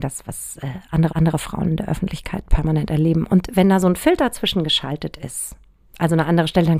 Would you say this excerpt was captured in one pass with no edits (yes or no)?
no